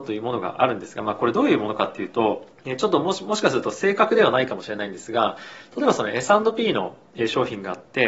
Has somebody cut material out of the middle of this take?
yes; 1 cut; at 2.5 s

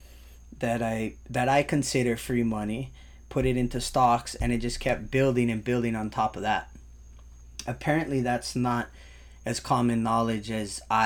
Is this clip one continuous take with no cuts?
yes; 0 cuts

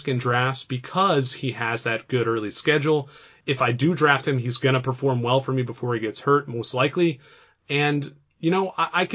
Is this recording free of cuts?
yes; 0 cuts

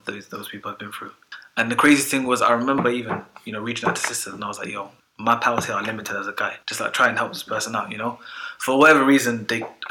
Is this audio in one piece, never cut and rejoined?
no; 2 cuts; at 5.0 s, 6.6 s

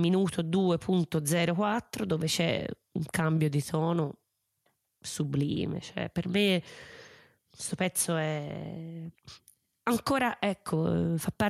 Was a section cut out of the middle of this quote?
no; 0 cuts

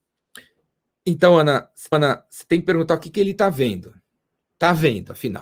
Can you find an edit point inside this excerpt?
yes; 2 cuts; at 1.9 s, 4.5 s

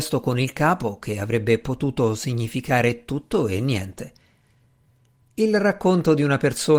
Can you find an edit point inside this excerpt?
no; 0 cuts

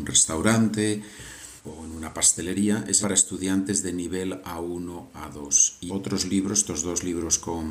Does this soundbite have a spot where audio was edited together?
yes; 3 cuts; at 1.6 s, 3.0 s, 5.9 s

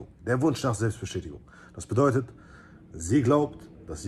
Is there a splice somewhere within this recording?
no; 0 cuts

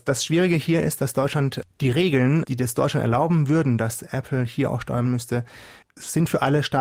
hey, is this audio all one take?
no; 1 cut; at 5.0 s

